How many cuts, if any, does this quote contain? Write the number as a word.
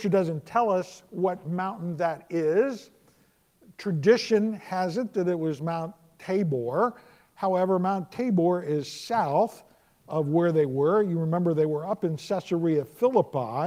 zero